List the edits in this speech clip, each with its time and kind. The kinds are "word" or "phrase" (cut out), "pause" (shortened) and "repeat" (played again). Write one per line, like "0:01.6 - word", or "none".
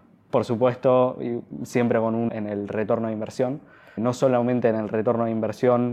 0:02.3 - word
0:04.0 - word

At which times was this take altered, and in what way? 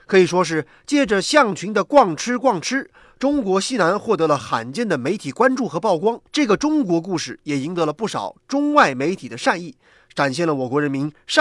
0:06.3 - pause

